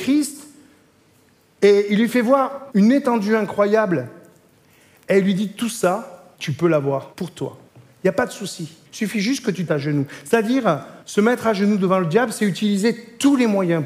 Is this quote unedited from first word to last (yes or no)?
no